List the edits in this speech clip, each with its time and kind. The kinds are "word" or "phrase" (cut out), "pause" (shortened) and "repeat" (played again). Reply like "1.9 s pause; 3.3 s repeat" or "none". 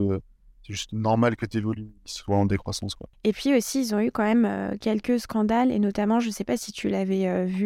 2.0 s pause